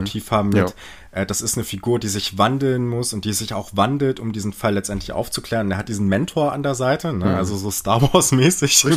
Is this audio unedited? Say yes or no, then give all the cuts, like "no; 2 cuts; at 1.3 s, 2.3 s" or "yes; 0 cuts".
yes; 0 cuts